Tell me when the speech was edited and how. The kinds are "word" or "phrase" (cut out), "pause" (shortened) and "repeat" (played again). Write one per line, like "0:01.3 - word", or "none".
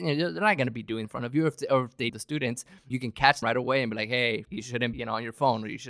0:01.0 - word
0:02.1 - word
0:02.9 - word
0:03.4 - word
0:04.4 - word
0:04.9 - word